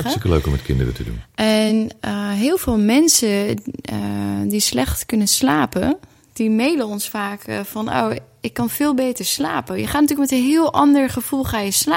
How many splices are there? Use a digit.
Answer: 0